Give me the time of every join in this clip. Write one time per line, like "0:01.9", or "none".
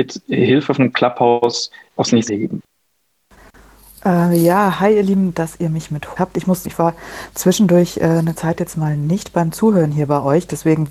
0:02.0
0:02.3
0:05.3
0:06.2
0:06.6
0:08.3